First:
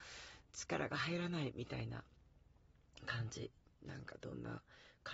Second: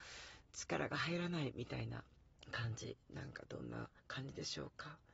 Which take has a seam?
second; 3 cuts; at 2.4 s, 3.0 s, 4.0 s

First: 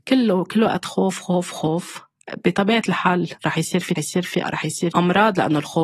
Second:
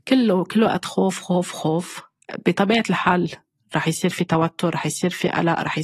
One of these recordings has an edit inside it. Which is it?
first; 4 cuts; at 3.4 s, 4.0 s, 4.4 s, 4.9 s

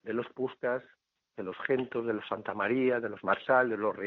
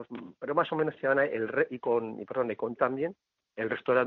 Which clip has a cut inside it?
second; 1 cut; at 2.8 s

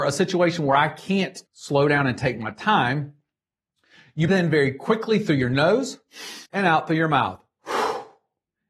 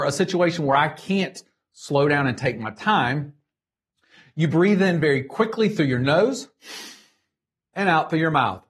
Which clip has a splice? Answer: first; 3 cuts; at 1.5 s, 4.3 s, 6.5 s

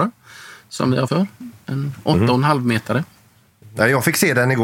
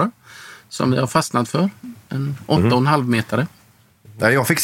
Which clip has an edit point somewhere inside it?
first; 1 cut; at 1.1 s

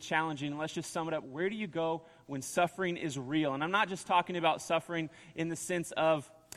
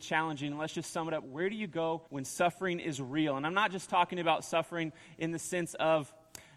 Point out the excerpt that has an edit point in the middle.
second; 1 cut; at 2.1 s

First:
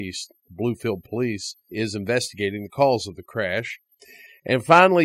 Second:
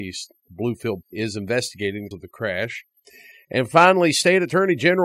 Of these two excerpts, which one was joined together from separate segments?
second; 2 cuts; at 1.0 s, 2.1 s

